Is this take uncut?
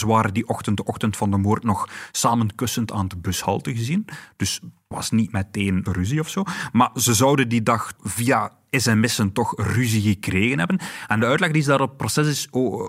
no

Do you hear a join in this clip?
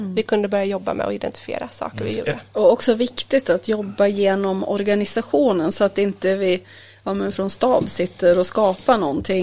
no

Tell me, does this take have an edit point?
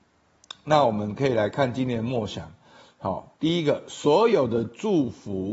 yes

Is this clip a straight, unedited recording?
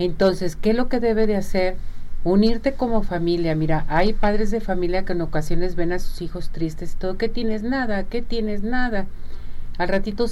yes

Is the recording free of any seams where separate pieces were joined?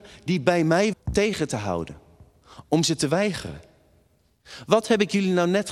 no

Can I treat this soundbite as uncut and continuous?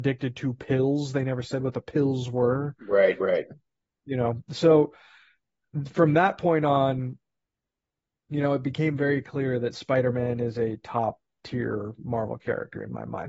yes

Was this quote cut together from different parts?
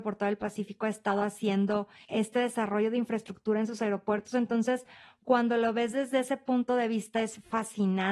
no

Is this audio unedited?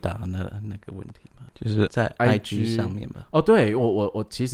yes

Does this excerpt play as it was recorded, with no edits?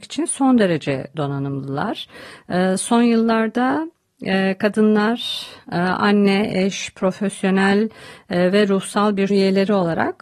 no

